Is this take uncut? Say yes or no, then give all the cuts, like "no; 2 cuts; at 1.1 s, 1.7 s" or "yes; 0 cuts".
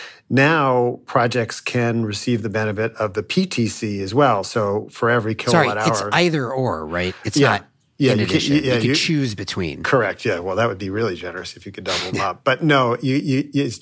yes; 0 cuts